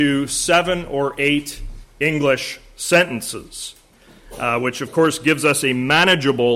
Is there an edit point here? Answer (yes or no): no